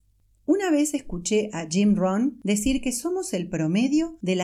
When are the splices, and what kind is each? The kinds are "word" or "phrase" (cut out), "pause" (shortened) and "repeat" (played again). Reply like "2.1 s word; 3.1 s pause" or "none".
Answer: none